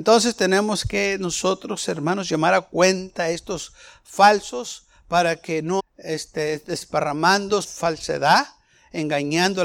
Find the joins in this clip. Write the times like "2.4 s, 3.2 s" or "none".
5.8 s, 7.6 s